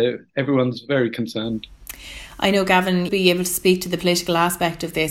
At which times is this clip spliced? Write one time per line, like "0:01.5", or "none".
0:03.1